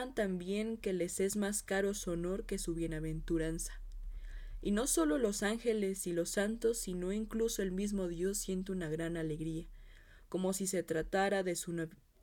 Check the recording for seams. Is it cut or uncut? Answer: uncut